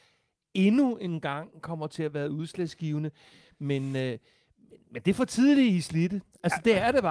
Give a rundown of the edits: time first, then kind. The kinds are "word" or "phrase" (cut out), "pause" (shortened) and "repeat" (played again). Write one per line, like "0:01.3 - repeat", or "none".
none